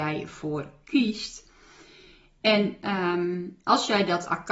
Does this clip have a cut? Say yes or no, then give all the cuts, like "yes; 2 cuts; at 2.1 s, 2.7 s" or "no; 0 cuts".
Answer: no; 0 cuts